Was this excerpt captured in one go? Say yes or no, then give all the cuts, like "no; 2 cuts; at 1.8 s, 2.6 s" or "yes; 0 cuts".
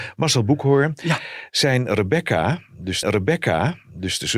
no; 1 cut; at 3.0 s